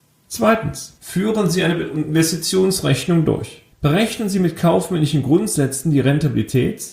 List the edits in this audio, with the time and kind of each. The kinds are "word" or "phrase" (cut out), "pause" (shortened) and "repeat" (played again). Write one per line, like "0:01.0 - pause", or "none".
0:01.0 - pause
0:03.7 - pause